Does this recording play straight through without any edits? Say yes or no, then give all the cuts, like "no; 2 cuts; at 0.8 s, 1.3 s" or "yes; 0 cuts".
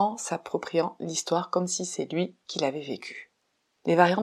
yes; 0 cuts